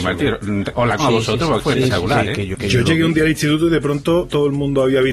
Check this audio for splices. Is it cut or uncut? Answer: cut